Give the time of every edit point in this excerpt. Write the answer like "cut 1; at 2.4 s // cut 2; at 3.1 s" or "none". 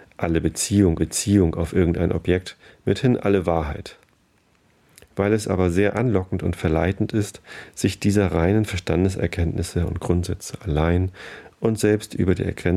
cut 1; at 1.0 s